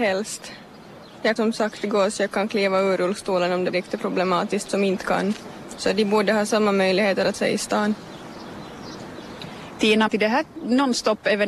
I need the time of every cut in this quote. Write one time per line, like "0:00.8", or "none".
0:01.4
0:03.7
0:04.7
0:07.3
0:10.1